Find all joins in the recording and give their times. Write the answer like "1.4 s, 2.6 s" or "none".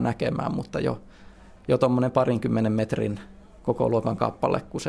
none